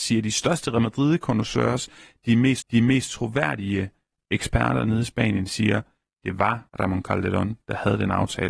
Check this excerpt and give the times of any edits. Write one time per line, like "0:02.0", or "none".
0:02.6
0:06.7